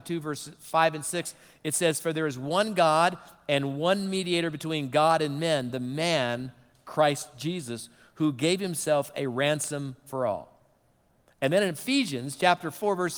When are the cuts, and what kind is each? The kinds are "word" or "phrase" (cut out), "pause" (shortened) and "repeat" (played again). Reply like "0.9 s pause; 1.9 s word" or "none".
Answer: none